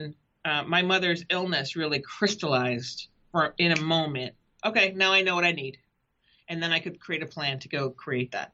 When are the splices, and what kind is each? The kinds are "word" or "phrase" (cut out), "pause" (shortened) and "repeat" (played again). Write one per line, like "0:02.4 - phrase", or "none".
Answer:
none